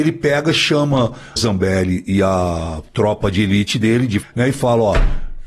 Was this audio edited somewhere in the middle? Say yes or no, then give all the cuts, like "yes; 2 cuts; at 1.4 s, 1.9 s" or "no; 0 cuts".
yes; 2 cuts; at 1.4 s, 4.2 s